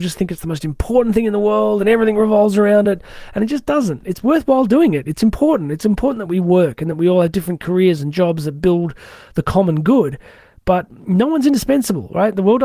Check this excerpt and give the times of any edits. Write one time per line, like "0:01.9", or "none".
none